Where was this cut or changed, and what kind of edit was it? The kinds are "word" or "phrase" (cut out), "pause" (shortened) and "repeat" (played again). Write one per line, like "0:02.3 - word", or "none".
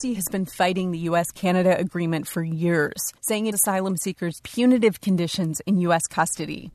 0:03.2 - pause
0:03.5 - word
0:04.4 - word